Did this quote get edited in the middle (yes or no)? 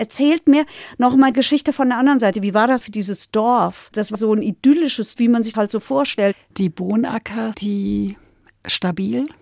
yes